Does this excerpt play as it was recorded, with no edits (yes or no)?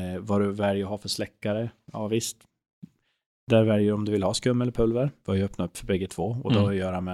yes